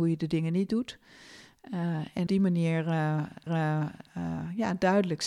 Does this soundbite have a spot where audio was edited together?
yes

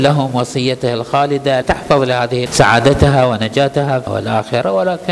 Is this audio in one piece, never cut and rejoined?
no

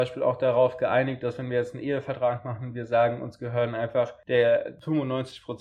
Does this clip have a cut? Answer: no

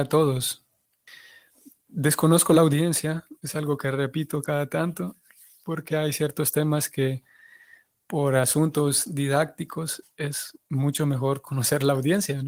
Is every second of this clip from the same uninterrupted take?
yes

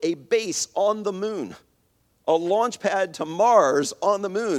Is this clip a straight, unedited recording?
yes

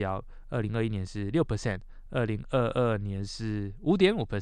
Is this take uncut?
yes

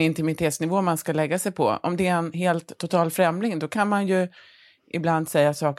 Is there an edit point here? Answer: no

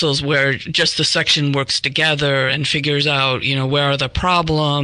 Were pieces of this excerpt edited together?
no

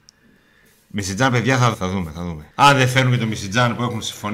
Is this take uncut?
no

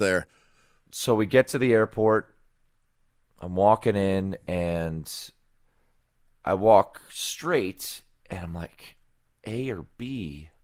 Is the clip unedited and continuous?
yes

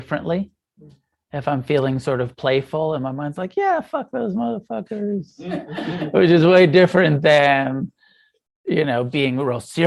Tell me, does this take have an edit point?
no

